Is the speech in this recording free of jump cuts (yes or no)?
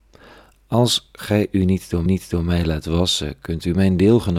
no